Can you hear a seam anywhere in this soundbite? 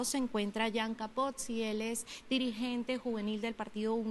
no; 0 cuts

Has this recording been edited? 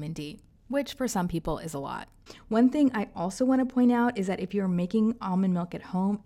no; 0 cuts

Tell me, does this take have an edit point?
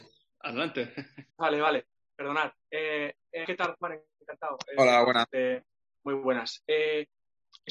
yes; 4 cuts; at 1.3 s, 2.6 s, 3.4 s, 6.0 s

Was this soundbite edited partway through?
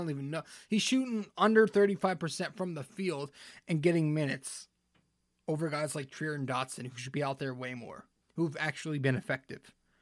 yes; 2 cuts; at 4.9 s, 8.2 s

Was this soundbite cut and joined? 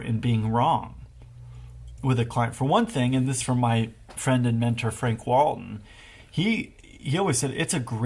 yes; 2 cuts; at 2.0 s, 3.4 s

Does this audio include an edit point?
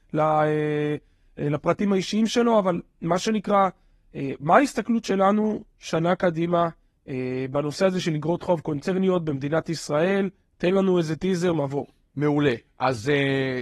no; 0 cuts

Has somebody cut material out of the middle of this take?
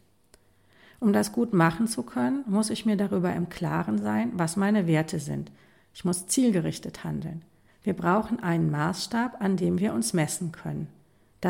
no; 0 cuts

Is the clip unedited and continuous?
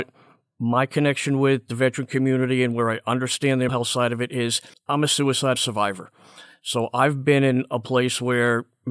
no; 3 cuts; at 3.7 s, 4.7 s, 5.5 s

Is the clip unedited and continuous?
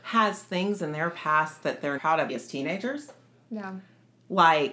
no; 2 cuts; at 2.0 s, 2.3 s

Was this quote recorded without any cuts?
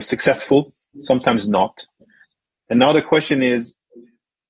no; 1 cut; at 2.5 s

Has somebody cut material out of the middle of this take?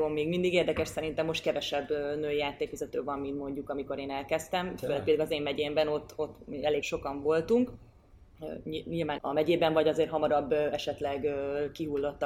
yes; 2 cuts; at 6.8 s, 9.2 s

